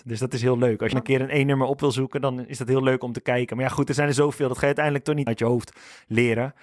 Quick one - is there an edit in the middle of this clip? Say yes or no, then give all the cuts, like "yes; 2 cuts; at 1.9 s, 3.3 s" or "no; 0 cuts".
yes; 2 cuts; at 0.9 s, 5.3 s